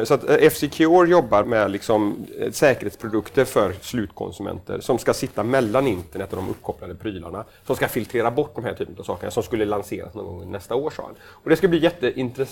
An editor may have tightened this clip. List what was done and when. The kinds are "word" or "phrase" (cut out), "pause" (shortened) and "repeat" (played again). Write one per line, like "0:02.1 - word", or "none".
0:01.4 - word